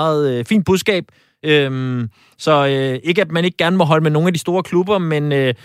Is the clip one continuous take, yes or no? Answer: yes